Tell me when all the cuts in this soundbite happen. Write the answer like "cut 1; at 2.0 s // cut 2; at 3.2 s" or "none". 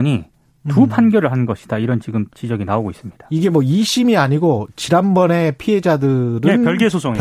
cut 1; at 2.3 s